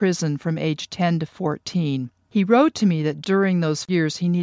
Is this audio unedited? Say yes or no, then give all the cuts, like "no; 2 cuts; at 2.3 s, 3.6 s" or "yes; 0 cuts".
yes; 0 cuts